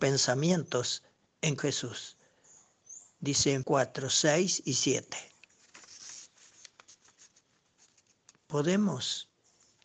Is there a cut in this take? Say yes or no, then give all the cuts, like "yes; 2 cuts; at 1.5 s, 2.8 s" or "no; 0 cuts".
yes; 2 cuts; at 1.6 s, 3.6 s